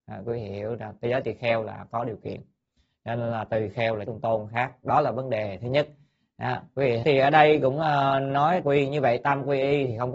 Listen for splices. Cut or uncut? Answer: cut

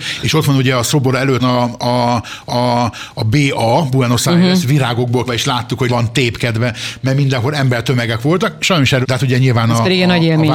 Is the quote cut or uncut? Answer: cut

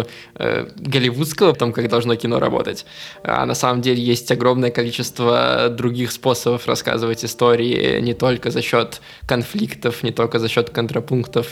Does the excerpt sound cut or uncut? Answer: cut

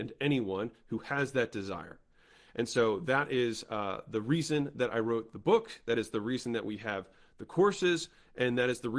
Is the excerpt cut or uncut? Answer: uncut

